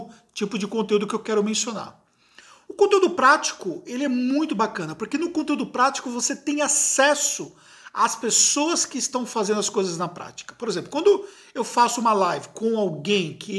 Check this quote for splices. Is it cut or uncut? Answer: uncut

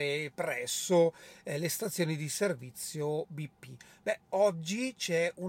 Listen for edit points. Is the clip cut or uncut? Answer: uncut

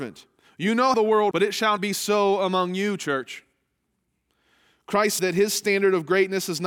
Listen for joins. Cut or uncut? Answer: cut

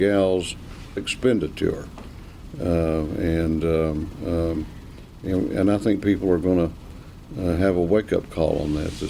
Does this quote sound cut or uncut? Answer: cut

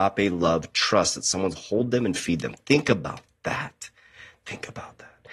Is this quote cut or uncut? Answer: cut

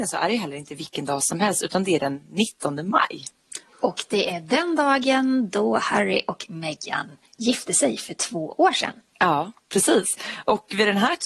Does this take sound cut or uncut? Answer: cut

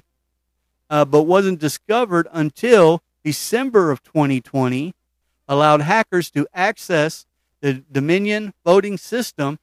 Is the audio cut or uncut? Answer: uncut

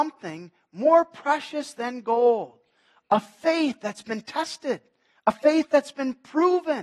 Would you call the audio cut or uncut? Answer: uncut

